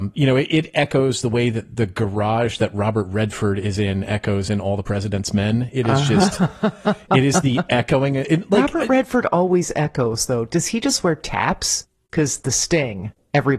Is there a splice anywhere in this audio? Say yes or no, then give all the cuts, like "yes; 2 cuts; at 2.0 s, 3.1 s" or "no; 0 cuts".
no; 0 cuts